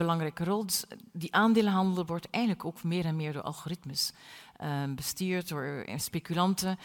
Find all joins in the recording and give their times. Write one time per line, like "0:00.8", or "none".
none